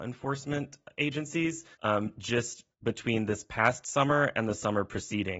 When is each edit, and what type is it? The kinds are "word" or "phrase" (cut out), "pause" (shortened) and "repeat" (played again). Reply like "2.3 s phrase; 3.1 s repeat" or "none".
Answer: 1.7 s pause; 2.7 s pause